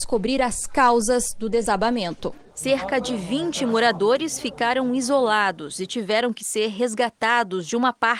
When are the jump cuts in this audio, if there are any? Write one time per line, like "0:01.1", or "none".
0:02.5